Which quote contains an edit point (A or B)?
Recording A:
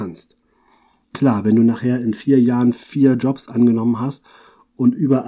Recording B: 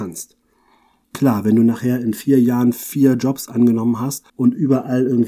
B